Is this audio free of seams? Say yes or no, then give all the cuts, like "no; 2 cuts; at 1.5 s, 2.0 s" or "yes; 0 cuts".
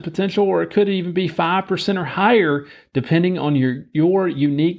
yes; 0 cuts